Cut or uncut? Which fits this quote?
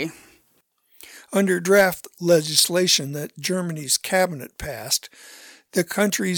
uncut